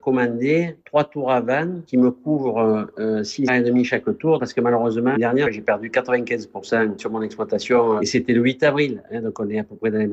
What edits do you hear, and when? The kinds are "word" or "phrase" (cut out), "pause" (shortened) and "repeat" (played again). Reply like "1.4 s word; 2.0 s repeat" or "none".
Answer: 3.5 s phrase; 5.2 s word